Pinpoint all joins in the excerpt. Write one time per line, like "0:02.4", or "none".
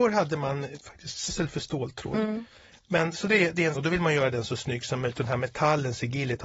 0:01.3
0:03.7